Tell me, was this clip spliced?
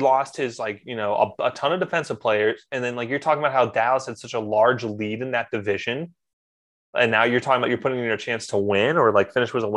no; 0 cuts

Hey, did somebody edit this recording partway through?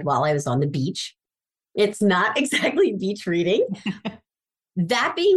no; 0 cuts

